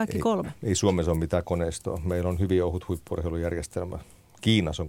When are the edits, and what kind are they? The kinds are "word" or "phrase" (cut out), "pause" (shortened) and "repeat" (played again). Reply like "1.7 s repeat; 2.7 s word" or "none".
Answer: none